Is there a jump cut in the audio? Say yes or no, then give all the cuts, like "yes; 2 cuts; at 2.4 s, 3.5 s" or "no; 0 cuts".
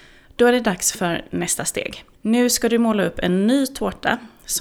yes; 1 cut; at 2.1 s